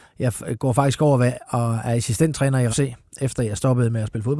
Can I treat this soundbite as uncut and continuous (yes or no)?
no